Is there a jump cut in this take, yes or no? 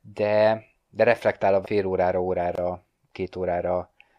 yes